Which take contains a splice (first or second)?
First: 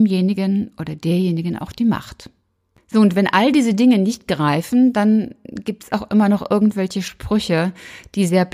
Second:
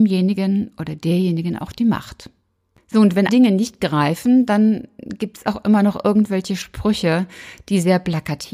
second